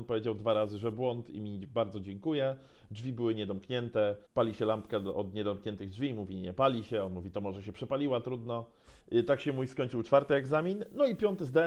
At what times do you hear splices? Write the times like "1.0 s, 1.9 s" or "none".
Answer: 4.3 s, 9.0 s